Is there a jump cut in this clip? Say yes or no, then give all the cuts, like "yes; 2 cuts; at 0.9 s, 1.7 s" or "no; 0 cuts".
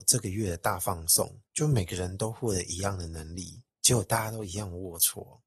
yes; 2 cuts; at 1.5 s, 3.7 s